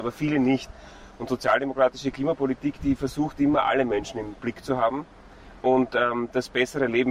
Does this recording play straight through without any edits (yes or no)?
yes